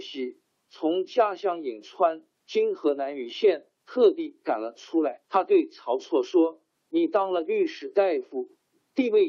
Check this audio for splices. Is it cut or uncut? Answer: cut